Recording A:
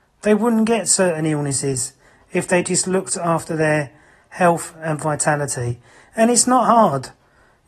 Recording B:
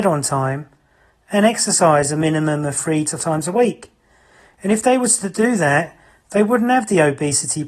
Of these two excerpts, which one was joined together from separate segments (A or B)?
B